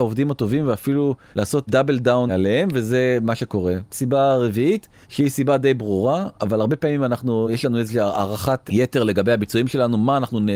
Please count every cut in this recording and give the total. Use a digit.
0